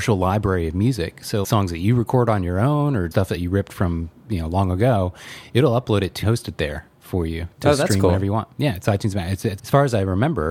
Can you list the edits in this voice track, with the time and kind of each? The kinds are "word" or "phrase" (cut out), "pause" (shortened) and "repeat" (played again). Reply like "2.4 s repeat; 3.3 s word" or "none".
1.4 s word; 3.1 s word; 6.2 s phrase; 8.5 s pause; 9.6 s word

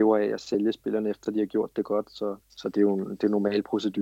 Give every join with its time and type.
2.4 s pause

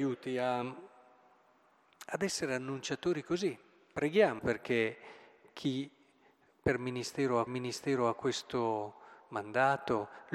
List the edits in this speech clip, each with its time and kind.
4.4 s word; 7.5 s repeat

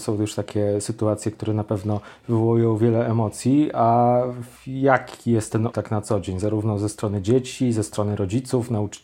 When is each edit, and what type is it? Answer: 4.6 s pause; 5.7 s word

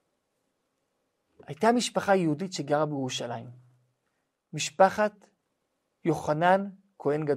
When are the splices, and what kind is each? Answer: none

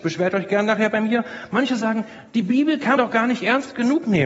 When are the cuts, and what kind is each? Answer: 2.3 s pause; 3.0 s word

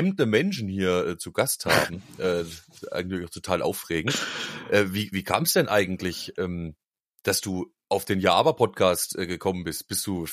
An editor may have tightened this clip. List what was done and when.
none

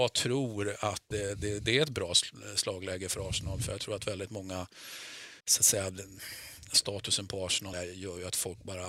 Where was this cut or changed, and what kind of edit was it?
1.1 s word; 5.4 s pause; 7.7 s phrase

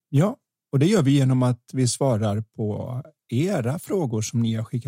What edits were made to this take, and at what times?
none

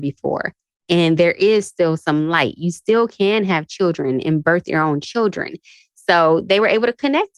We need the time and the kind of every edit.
none

